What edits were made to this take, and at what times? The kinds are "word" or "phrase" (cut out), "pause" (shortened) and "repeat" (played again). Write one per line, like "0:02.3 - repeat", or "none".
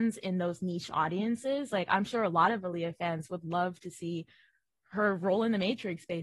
none